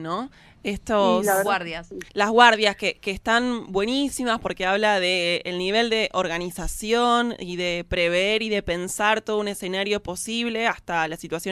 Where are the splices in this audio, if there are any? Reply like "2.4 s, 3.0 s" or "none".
2.1 s

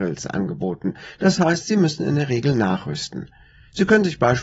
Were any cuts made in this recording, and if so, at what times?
none

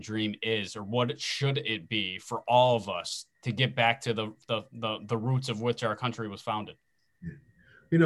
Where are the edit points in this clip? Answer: 3.3 s

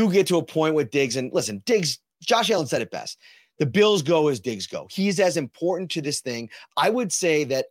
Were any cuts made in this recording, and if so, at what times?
none

